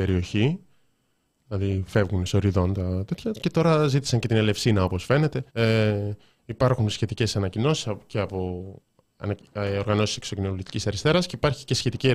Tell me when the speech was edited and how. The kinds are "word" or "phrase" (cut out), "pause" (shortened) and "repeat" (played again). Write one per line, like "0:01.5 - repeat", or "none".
0:05.5 - pause